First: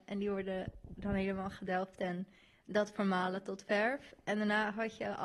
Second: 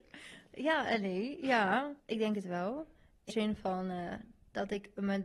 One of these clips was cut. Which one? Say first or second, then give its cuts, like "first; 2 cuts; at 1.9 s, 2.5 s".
second; 2 cuts; at 2.0 s, 3.3 s